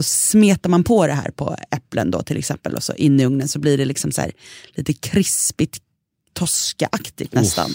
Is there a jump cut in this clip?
no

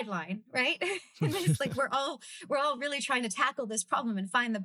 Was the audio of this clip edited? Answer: no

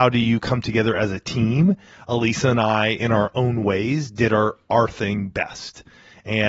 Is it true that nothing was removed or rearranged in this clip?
yes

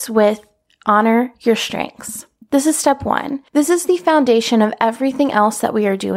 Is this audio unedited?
no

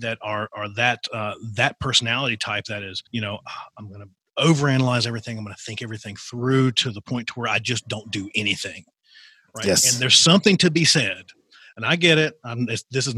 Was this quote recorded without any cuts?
no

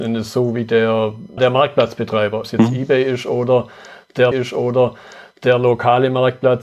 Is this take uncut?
no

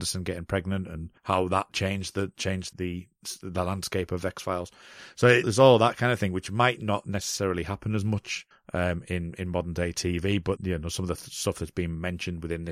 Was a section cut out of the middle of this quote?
yes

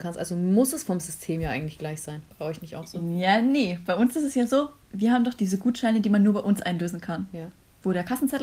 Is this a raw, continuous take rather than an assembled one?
no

